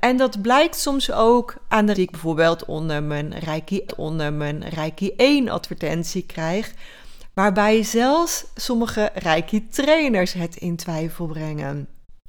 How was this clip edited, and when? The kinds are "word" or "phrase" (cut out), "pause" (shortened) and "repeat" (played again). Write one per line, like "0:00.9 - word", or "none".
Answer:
0:01.9 - word
0:03.9 - repeat